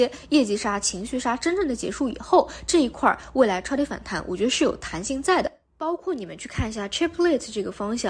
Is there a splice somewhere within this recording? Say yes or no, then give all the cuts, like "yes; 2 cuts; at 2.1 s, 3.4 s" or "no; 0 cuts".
no; 0 cuts